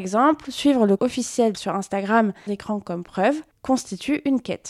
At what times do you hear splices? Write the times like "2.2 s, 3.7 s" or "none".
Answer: 1.0 s, 1.5 s, 2.5 s